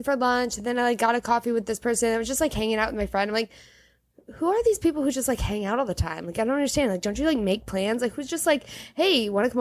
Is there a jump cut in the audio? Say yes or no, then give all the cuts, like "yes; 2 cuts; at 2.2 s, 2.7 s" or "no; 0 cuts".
no; 0 cuts